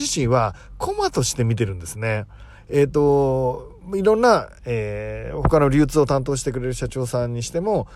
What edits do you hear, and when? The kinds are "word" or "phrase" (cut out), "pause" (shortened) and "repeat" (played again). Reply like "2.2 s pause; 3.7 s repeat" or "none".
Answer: none